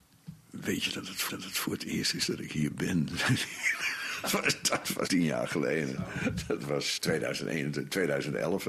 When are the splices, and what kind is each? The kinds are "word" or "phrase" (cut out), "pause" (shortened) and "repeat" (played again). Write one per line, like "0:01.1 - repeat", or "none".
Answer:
0:01.3 - repeat
0:05.1 - word
0:07.0 - word

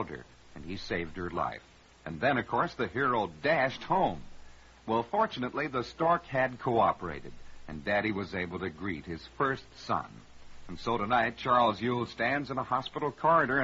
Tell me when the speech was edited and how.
none

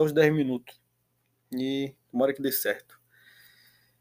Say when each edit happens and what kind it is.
none

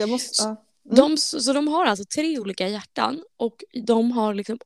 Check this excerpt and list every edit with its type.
none

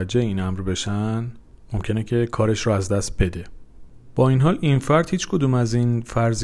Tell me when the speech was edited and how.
none

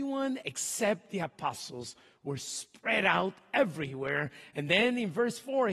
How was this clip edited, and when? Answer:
none

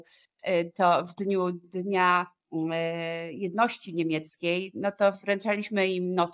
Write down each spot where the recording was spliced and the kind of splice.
none

